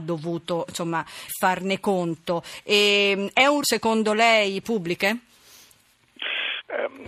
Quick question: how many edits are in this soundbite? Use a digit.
3